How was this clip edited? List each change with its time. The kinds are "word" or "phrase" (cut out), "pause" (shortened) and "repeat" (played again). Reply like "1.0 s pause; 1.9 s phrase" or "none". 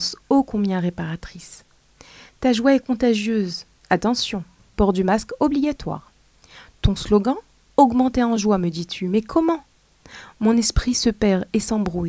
none